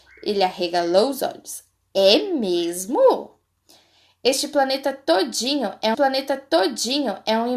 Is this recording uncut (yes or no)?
no